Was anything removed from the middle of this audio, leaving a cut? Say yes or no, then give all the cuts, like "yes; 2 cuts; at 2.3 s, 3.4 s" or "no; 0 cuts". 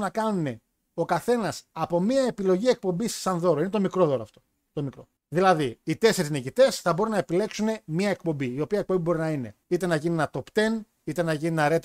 yes; 2 cuts; at 5.2 s, 9.6 s